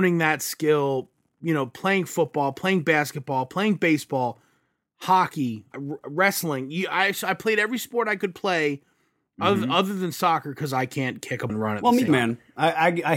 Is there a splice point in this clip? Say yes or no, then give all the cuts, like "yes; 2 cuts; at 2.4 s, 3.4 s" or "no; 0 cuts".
yes; 3 cuts; at 5.7 s, 11.5 s, 12.1 s